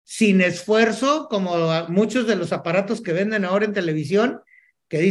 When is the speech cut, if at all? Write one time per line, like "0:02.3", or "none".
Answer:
none